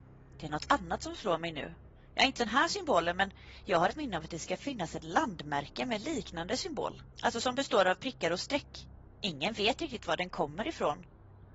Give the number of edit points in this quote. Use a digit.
2